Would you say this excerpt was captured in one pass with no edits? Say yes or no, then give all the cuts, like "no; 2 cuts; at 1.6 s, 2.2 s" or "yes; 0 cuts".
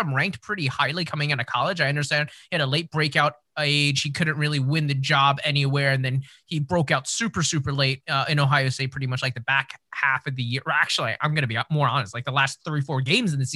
yes; 0 cuts